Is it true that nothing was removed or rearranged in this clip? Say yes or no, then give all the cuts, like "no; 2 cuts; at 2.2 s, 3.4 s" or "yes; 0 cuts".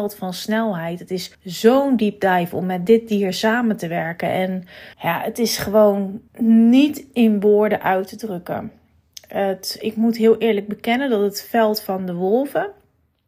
no; 3 cuts; at 1.3 s, 4.9 s, 6.3 s